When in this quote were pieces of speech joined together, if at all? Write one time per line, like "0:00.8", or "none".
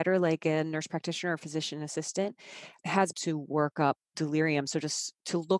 0:03.1